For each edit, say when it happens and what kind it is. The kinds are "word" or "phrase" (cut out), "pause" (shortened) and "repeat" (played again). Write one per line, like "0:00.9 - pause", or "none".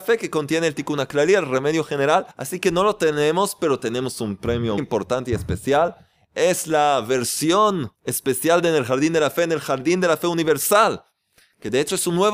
0:02.3 - pause
0:04.8 - word
0:08.0 - pause